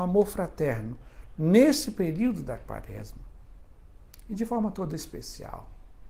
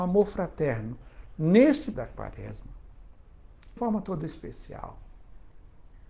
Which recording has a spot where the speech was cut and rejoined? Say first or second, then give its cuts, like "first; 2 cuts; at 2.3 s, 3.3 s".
second; 2 cuts; at 1.9 s, 3.8 s